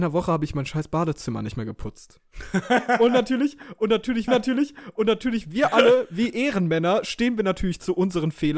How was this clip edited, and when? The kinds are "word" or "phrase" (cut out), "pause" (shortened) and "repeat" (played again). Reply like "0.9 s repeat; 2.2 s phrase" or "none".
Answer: 4.3 s repeat; 6.3 s word